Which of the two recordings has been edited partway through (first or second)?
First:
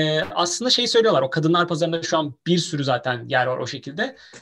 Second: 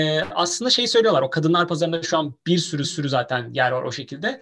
second